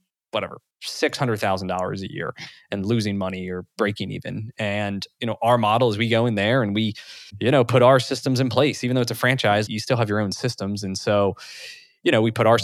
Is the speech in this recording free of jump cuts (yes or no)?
no